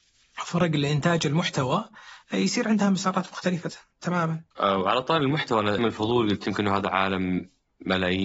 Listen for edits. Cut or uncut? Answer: cut